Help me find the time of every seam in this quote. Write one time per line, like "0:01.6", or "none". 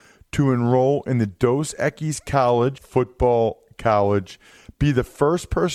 0:02.8